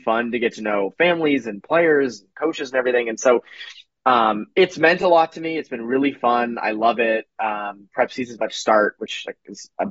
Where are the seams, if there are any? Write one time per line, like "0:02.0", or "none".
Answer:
none